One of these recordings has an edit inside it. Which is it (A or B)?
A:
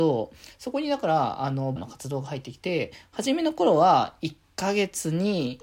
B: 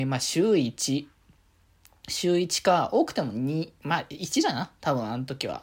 A